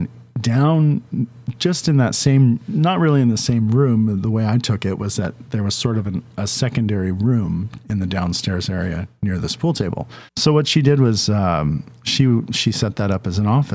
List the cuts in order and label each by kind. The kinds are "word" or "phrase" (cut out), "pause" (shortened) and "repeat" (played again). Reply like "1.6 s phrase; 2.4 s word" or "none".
10.3 s pause